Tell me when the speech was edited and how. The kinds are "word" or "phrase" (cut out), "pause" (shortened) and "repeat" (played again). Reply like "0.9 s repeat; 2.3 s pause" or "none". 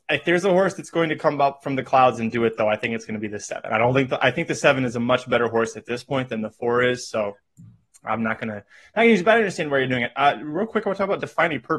none